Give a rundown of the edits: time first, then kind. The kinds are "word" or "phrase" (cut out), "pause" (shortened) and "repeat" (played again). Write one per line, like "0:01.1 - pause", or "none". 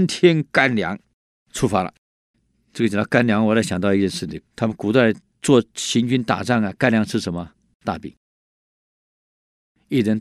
0:01.2 - pause
0:02.3 - pause
0:04.5 - pause